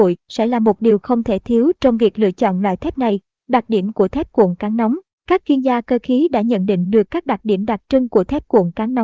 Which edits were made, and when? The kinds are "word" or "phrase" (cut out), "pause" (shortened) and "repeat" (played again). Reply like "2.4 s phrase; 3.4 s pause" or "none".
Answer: none

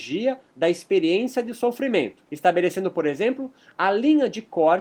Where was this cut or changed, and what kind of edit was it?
2.3 s pause

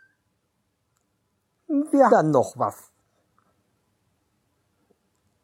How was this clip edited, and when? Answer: 1.5 s phrase; 2.1 s word

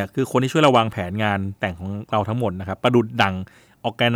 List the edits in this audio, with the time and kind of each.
1.6 s pause

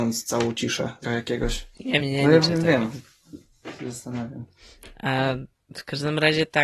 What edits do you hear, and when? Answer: 1.0 s word; 2.0 s word

